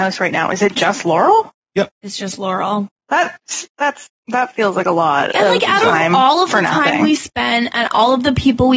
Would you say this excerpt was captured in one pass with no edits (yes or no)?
yes